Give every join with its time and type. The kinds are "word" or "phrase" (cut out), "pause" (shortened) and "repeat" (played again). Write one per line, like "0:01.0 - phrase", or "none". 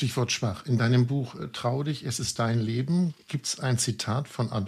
none